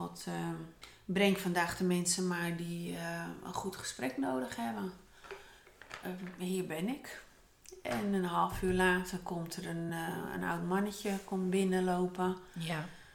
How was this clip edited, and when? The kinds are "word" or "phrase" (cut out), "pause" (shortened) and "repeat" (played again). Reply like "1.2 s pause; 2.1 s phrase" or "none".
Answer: none